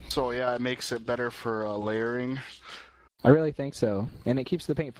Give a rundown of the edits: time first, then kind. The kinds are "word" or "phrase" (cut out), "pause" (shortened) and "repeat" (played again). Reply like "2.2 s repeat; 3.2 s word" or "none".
none